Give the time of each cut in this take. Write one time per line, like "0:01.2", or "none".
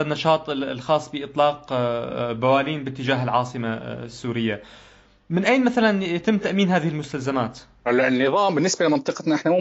none